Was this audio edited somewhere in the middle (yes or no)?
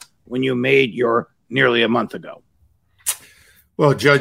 yes